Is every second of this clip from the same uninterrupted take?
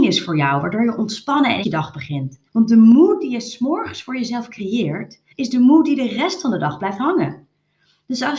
no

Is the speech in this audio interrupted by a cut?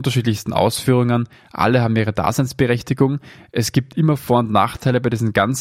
no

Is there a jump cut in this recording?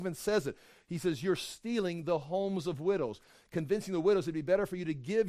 no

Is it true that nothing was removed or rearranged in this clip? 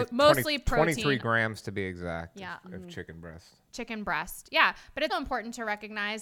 no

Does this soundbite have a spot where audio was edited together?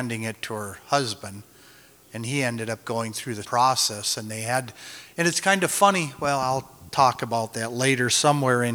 yes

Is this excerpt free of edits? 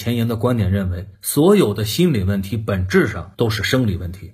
no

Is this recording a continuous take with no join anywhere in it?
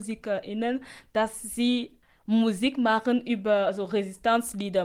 yes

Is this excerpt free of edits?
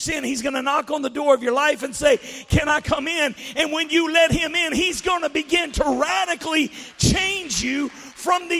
yes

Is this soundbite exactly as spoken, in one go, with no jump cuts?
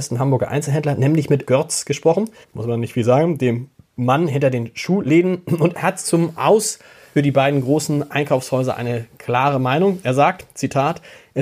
no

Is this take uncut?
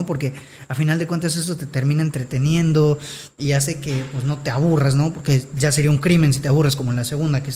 yes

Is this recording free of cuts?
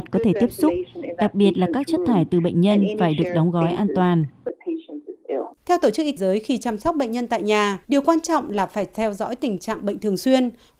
no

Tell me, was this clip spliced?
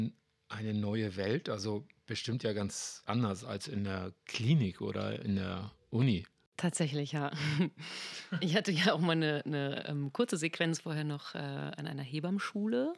no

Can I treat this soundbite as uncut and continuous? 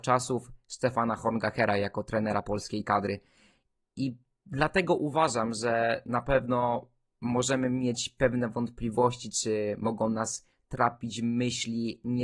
yes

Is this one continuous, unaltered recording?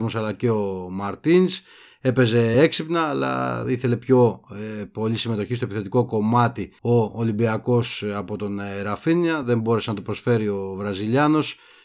yes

